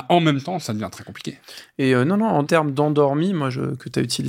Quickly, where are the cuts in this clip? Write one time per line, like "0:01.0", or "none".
0:02.5